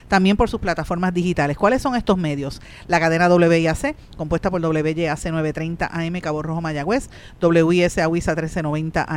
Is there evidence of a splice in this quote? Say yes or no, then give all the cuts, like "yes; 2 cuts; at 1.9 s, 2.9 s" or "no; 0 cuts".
no; 0 cuts